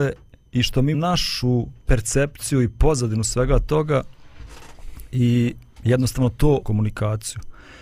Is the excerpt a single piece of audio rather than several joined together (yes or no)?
no